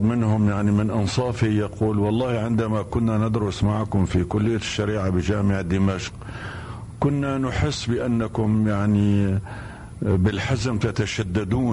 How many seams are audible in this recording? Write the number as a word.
zero